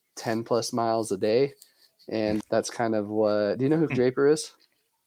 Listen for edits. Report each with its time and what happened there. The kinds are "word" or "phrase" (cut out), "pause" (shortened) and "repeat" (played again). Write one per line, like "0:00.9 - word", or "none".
0:02.4 - word
0:03.9 - word